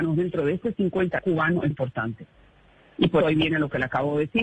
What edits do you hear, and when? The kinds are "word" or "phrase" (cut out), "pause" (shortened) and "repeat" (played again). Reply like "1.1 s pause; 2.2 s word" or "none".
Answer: 1.2 s word; 1.7 s word; 3.2 s word